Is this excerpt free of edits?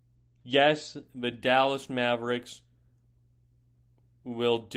yes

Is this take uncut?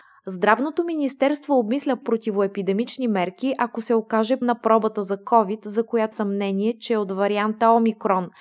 no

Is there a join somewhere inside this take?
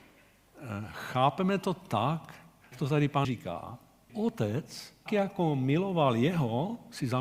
yes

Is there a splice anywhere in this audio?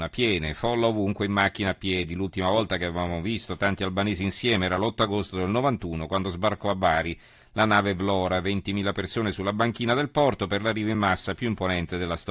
no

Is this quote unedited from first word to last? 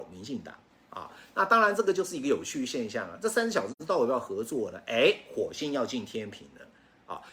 yes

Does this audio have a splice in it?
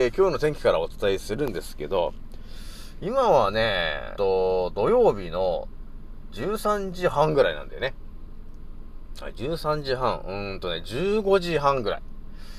yes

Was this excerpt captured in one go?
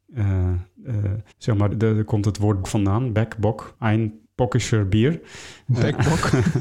no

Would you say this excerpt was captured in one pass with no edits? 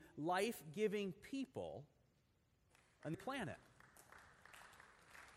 no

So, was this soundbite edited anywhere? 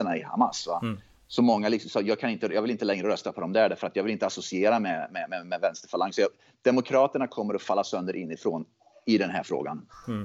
no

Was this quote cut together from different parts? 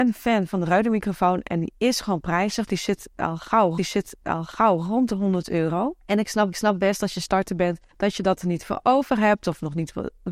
yes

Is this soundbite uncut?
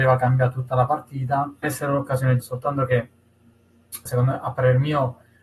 no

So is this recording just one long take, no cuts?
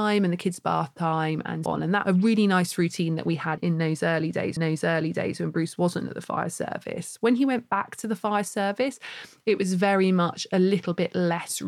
no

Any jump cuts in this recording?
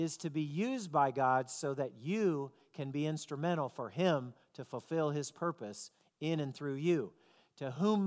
no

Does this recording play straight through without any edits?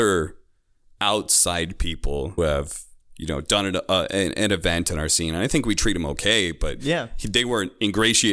no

